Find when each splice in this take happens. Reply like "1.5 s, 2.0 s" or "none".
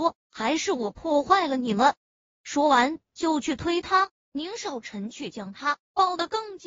2.3 s, 4.2 s